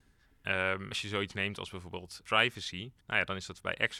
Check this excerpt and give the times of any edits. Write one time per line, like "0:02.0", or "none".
0:03.0